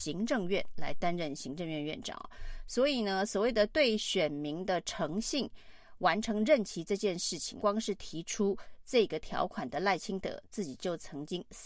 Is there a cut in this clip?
yes; 1 cut; at 7.6 s

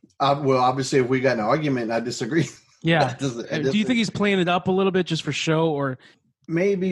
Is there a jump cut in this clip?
no; 0 cuts

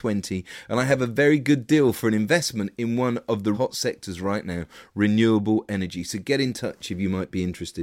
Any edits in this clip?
yes; 1 cut; at 3.5 s

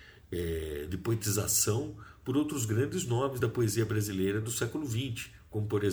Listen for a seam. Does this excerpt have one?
no; 0 cuts

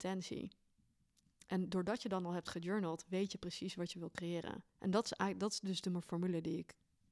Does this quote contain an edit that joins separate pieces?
yes; 1 cut; at 4.7 s

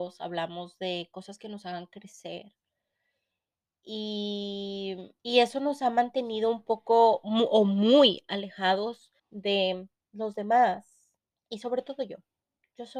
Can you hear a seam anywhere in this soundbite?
yes; 3 cuts; at 5.2 s, 9.2 s, 11.2 s

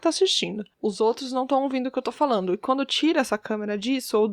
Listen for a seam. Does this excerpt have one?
no; 0 cuts

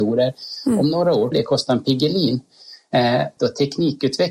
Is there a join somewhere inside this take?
yes; 2 cuts; at 1.3 s, 3.4 s

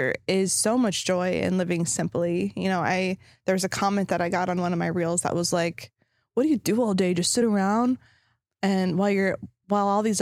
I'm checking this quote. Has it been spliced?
no; 0 cuts

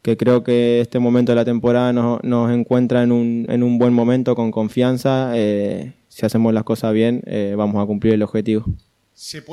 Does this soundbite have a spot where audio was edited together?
no; 0 cuts

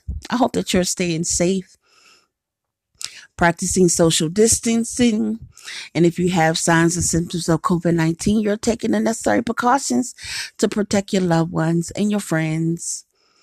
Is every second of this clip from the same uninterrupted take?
yes; 0 cuts

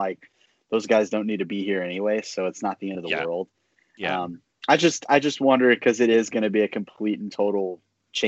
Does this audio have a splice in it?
no; 0 cuts

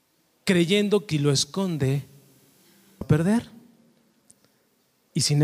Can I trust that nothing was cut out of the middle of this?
no; 2 cuts; at 1.1 s, 3.0 s

